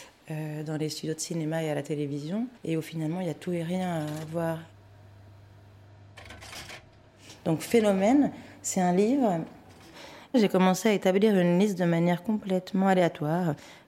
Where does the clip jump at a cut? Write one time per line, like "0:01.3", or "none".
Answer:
0:02.6